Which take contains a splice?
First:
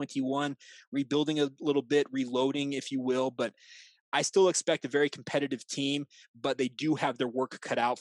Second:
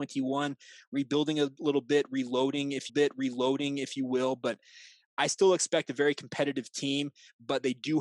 second; 1 cut; at 2.9 s

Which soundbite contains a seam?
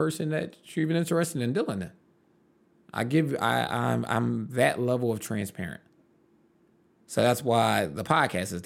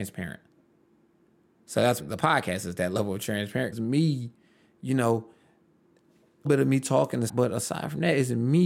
second; 4 cuts; at 2.0 s, 3.7 s, 6.4 s, 7.3 s

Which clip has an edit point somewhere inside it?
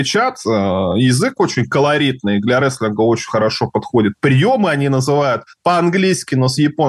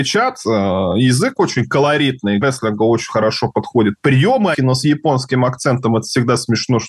second; 2 cuts; at 2.4 s, 4.5 s

